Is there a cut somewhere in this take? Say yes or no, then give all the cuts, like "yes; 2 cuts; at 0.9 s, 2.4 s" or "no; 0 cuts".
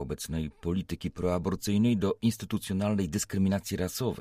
no; 0 cuts